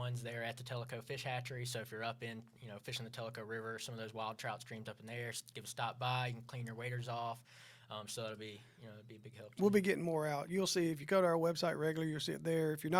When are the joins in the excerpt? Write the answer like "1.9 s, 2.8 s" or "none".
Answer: none